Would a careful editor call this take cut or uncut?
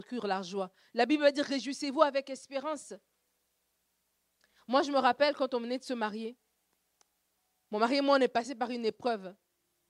uncut